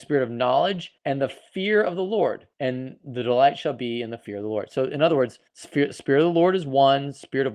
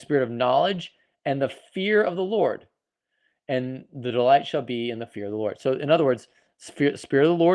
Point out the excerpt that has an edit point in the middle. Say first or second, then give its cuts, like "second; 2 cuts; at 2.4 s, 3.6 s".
first; 3 cuts; at 1.0 s, 2.5 s, 5.5 s